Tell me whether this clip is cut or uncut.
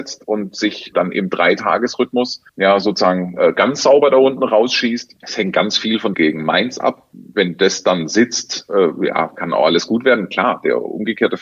cut